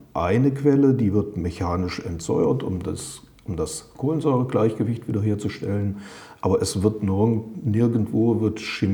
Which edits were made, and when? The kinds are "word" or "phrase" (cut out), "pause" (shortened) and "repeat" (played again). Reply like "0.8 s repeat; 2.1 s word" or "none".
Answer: none